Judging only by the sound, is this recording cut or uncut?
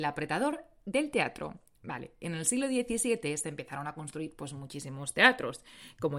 uncut